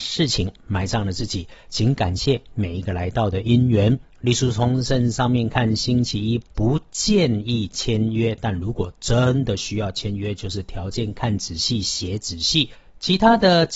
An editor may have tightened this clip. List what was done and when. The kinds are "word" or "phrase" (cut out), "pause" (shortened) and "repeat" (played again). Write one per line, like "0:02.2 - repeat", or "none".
none